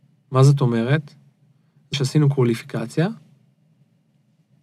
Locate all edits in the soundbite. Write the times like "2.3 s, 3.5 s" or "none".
1.9 s